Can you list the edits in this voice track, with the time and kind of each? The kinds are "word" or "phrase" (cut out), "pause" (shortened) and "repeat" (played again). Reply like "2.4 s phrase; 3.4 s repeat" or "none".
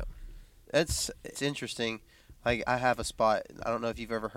1.3 s word; 2.7 s word